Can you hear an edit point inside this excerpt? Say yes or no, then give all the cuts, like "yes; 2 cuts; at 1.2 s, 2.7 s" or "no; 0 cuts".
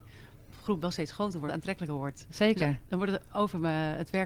yes; 1 cut; at 1.5 s